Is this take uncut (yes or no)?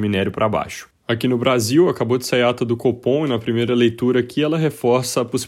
yes